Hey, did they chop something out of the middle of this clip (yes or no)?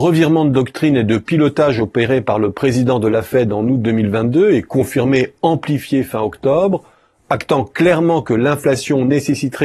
no